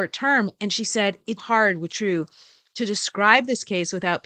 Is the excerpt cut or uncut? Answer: cut